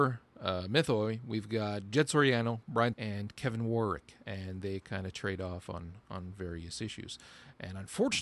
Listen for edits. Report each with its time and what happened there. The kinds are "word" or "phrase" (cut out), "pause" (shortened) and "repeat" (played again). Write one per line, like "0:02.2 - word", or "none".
0:02.9 - word